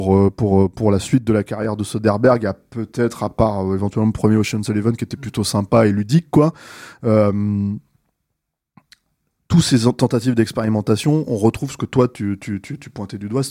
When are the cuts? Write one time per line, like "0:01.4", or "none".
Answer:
none